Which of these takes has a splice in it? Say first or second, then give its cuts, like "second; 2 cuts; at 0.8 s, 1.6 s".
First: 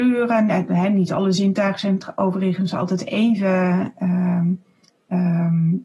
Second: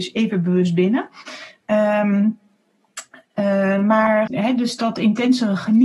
second; 1 cut; at 4.3 s